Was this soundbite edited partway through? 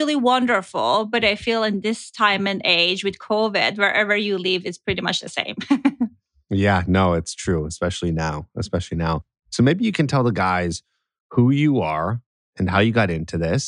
no; 0 cuts

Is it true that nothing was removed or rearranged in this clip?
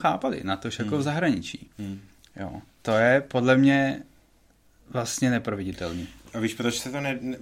yes; 0 cuts

